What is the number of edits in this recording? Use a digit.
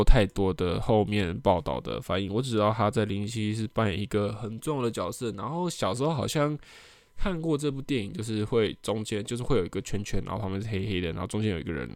0